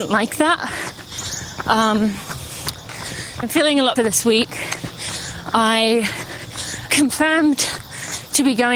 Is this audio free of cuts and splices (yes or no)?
no